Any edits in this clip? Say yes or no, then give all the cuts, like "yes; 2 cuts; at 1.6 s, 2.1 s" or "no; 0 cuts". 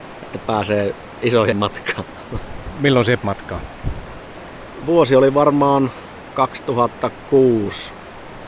yes; 2 cuts; at 1.5 s, 3.2 s